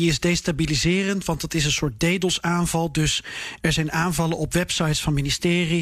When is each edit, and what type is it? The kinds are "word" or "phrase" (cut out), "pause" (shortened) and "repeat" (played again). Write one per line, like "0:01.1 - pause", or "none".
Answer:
none